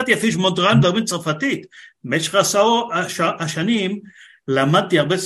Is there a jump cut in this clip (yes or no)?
no